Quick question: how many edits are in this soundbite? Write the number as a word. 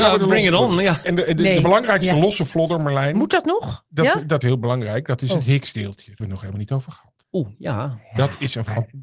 four